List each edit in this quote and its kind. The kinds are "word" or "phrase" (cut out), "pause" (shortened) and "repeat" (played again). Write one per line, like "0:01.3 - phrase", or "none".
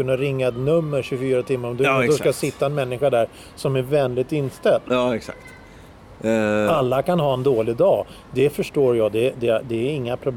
0:06.2 - pause